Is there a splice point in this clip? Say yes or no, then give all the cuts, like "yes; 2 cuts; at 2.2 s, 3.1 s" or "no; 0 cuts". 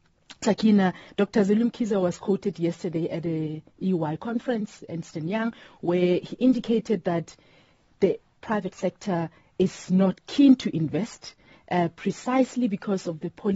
no; 0 cuts